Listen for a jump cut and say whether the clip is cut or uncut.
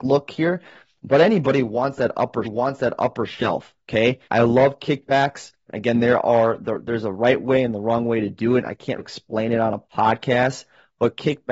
cut